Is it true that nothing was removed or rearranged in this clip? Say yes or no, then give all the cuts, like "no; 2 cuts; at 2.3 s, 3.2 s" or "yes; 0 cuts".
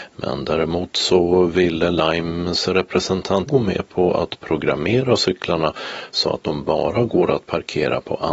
no; 1 cut; at 3.5 s